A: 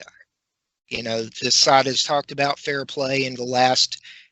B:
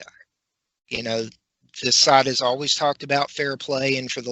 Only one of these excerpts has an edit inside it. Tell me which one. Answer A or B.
A